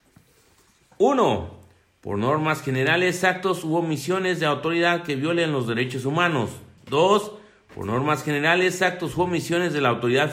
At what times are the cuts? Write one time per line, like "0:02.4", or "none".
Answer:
none